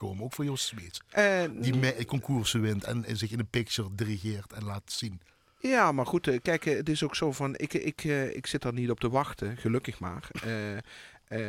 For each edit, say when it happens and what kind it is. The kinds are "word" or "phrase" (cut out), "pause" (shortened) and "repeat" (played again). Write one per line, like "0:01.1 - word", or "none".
none